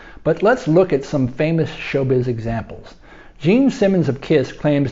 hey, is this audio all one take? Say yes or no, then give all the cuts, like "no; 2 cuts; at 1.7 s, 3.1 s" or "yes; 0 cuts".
yes; 0 cuts